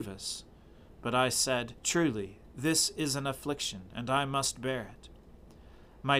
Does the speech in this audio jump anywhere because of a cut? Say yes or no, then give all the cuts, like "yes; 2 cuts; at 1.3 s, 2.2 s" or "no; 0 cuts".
yes; 1 cut; at 1.8 s